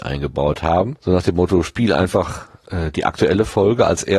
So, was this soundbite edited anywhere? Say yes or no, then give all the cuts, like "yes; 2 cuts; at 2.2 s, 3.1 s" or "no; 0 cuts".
yes; 1 cut; at 1.0 s